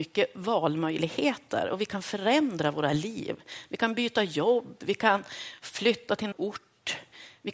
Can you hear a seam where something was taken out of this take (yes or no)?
yes